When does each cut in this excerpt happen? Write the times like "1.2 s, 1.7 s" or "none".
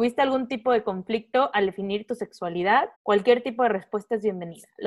2.9 s